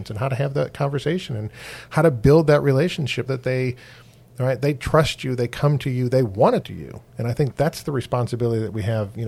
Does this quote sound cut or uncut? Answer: cut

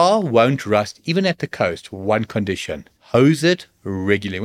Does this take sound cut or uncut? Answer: cut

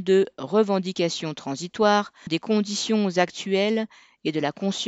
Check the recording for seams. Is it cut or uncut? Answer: cut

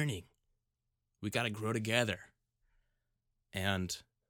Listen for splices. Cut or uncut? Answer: uncut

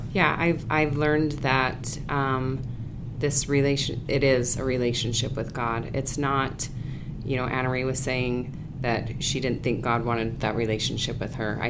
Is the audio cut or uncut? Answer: uncut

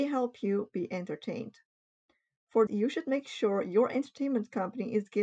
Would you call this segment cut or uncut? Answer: cut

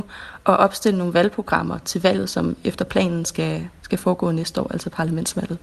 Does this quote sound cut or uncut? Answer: uncut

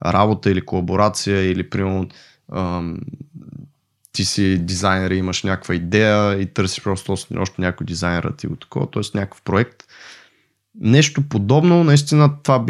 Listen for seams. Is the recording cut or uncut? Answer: uncut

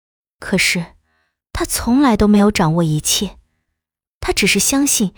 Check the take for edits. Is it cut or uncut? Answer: uncut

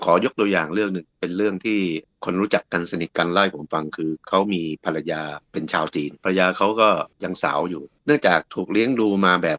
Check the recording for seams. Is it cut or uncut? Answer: cut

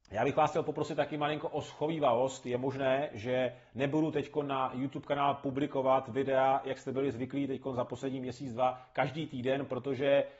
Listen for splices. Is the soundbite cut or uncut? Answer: uncut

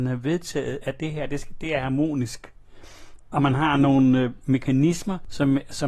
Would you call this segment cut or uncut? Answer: uncut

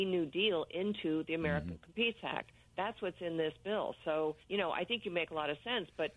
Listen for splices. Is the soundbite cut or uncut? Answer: cut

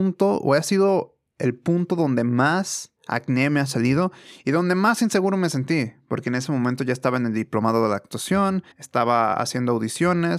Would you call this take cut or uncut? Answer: cut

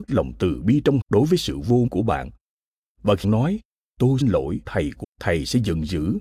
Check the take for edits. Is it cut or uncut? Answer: cut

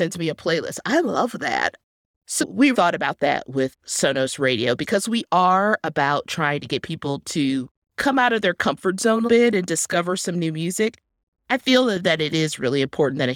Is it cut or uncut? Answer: cut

